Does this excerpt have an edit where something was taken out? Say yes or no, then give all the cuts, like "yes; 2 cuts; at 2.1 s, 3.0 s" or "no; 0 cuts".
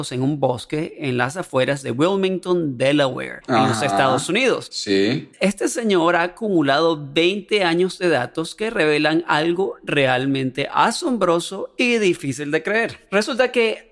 no; 0 cuts